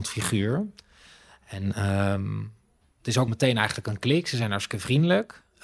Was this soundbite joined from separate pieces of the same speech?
yes; 1 cut; at 3.3 s

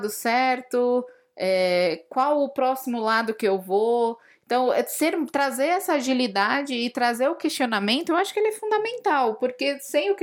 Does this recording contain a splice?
no; 0 cuts

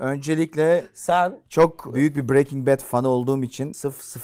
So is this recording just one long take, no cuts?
yes; 0 cuts

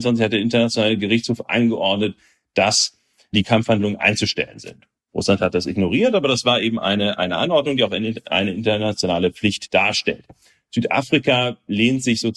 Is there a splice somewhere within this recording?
no; 0 cuts

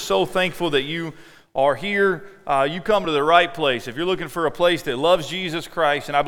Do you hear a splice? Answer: no; 0 cuts

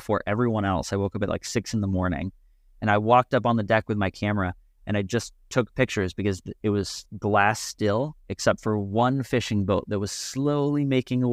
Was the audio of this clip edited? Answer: no; 0 cuts

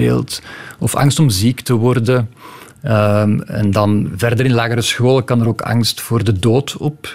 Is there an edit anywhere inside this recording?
no; 0 cuts

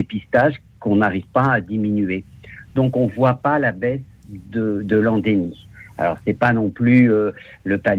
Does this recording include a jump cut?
no; 0 cuts

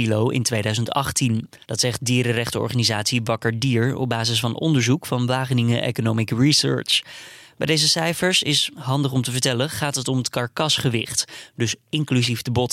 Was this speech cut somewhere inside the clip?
yes; 1 cut; at 1.6 s

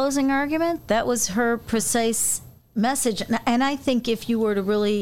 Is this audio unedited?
yes; 0 cuts

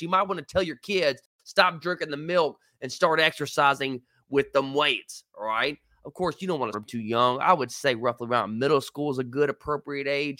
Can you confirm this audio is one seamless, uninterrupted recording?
no; 1 cut; at 6.7 s

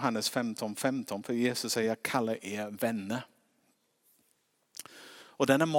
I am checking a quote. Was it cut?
no; 0 cuts

